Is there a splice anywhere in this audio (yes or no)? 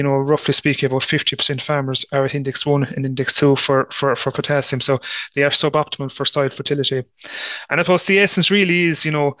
no